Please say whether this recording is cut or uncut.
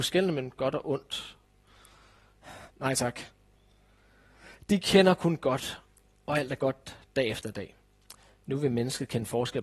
cut